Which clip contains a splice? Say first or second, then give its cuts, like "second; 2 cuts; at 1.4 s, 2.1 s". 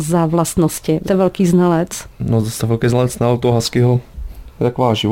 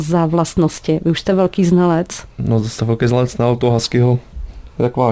first; 1 cut; at 1.0 s